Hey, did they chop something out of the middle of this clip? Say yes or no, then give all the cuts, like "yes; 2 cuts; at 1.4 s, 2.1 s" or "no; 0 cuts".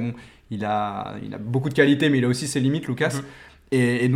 no; 0 cuts